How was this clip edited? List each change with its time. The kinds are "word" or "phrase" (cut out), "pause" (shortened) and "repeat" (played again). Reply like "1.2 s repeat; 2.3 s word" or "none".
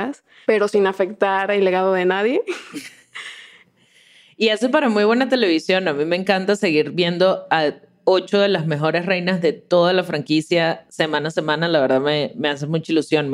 none